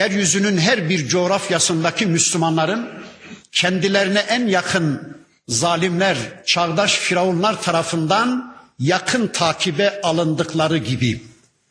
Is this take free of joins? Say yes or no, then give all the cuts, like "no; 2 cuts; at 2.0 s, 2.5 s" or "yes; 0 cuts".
yes; 0 cuts